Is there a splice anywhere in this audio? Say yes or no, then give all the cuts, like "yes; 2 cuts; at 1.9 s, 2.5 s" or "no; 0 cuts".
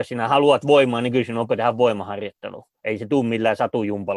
yes; 1 cut; at 1.5 s